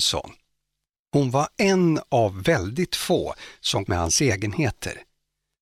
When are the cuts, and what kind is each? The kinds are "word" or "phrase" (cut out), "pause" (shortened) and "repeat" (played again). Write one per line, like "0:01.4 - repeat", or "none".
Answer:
0:03.9 - phrase